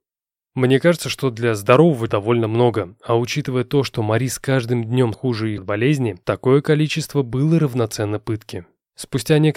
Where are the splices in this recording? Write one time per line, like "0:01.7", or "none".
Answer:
0:02.1
0:05.1
0:05.6